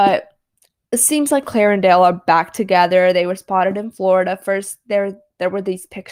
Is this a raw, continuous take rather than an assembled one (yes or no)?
yes